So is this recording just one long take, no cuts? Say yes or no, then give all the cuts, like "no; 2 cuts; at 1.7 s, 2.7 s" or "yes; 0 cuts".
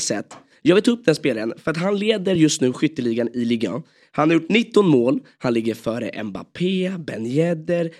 yes; 0 cuts